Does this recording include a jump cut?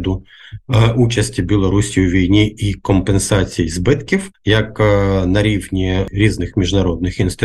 yes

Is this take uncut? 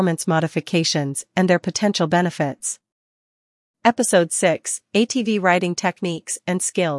yes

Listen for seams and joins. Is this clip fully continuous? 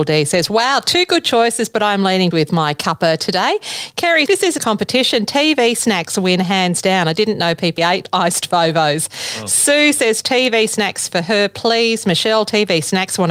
no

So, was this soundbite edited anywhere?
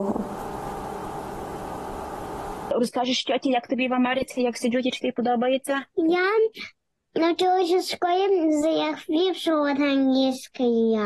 no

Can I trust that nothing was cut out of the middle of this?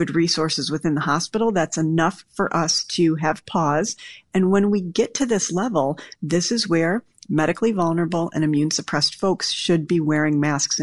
yes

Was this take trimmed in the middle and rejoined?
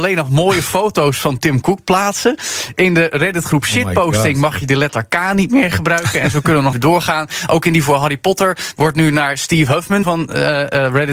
yes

